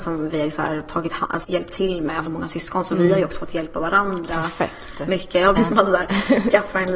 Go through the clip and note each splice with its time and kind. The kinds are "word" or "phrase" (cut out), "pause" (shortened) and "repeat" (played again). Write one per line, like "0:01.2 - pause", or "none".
0:01.4 - word
0:02.3 - phrase
0:05.6 - word